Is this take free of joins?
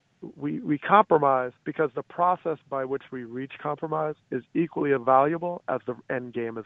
no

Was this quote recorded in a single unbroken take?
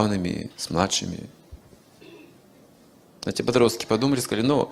yes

